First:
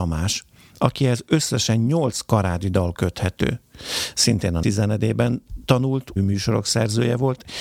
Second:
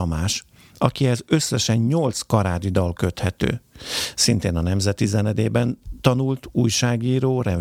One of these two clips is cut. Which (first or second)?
first